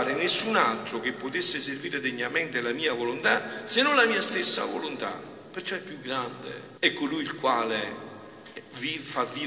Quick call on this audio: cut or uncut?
cut